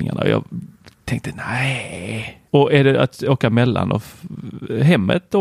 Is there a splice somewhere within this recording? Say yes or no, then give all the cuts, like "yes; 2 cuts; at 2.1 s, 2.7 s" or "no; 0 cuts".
yes; 1 cut; at 2.5 s